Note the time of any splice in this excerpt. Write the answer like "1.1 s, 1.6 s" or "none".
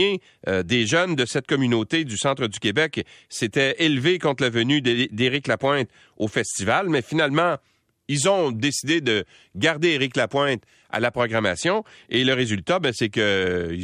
none